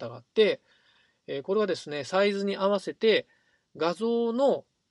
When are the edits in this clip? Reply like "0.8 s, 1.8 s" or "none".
none